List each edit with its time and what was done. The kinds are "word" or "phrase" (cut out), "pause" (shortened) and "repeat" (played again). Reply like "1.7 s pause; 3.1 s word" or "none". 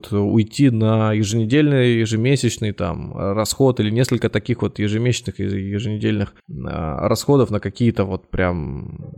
6.4 s pause